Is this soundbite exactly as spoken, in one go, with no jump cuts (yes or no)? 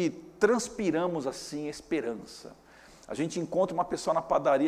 yes